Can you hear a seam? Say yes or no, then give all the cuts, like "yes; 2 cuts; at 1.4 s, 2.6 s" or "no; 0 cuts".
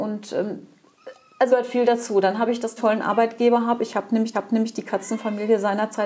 yes; 3 cuts; at 1.5 s, 2.8 s, 4.3 s